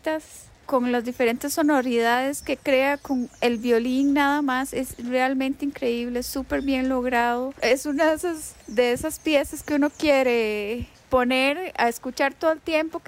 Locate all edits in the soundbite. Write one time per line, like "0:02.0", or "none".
0:08.6

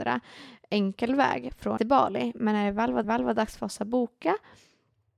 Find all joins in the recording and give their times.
0:01.8
0:03.0

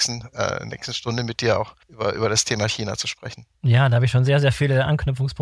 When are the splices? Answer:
0:01.8
0:03.5

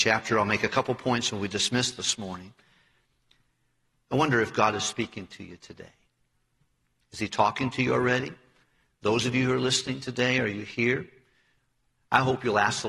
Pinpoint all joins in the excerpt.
none

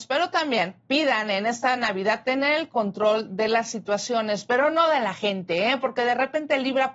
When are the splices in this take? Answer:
none

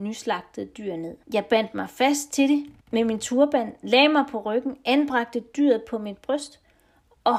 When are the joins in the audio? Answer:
0:01.2
0:02.8

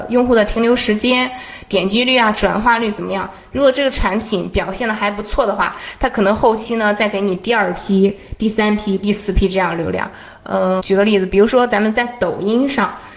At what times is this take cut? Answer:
0:10.8

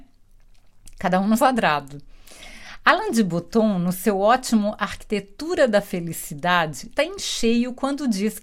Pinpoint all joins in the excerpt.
0:01.4
0:07.0

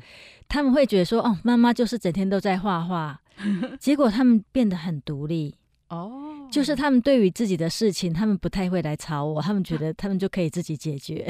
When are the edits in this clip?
none

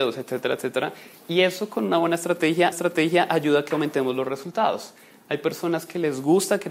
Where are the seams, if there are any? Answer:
0:02.7

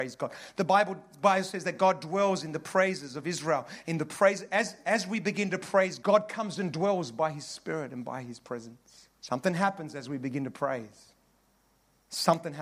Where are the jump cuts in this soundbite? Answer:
0:06.0
0:09.1

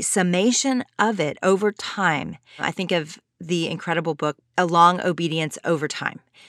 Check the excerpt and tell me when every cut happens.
none

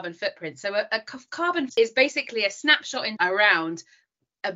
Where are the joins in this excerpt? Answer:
0:01.7
0:03.2

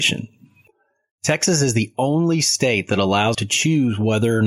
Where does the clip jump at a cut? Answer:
0:03.3

